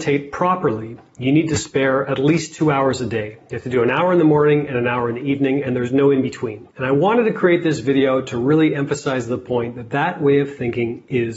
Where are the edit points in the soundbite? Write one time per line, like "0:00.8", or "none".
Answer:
none